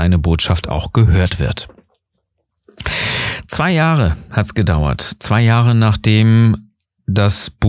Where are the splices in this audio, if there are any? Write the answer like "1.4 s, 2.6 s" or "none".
none